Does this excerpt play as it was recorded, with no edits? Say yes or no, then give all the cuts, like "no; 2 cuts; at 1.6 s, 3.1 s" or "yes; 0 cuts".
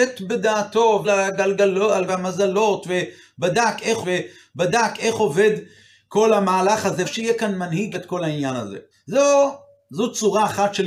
no; 6 cuts; at 1.0 s, 2.1 s, 4.0 s, 7.0 s, 7.9 s, 8.9 s